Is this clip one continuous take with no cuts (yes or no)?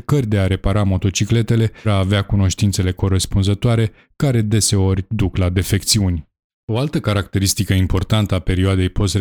no